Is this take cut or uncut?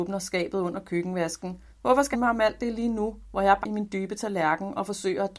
cut